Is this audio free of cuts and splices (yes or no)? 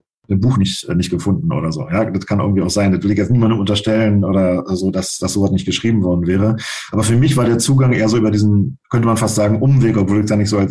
yes